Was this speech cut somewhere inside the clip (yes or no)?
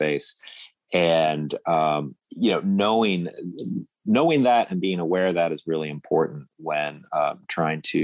yes